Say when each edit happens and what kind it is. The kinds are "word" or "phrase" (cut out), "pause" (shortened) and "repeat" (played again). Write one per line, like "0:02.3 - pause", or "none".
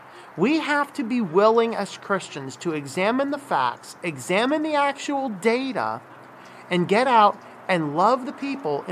none